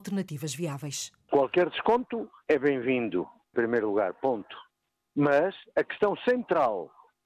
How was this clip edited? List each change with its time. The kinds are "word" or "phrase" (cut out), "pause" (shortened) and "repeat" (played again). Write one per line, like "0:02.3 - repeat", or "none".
0:03.5 - word